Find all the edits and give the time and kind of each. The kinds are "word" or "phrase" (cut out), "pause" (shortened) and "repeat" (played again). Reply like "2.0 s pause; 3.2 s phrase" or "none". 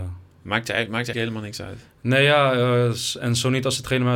1.1 s word